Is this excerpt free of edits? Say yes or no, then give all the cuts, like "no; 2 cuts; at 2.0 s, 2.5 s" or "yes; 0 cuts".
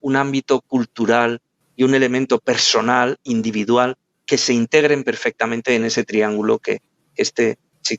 yes; 0 cuts